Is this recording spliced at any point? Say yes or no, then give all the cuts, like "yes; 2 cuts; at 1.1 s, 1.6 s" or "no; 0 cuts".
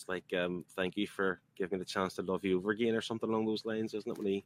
no; 0 cuts